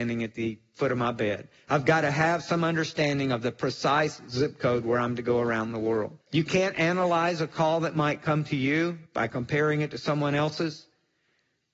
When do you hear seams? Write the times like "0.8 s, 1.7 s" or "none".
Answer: 6.2 s, 9.1 s